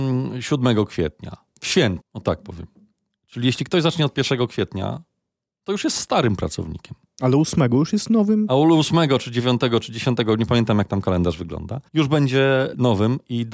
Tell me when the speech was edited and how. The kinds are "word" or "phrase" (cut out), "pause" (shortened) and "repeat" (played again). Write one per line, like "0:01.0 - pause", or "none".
0:02.0 - word
0:11.9 - pause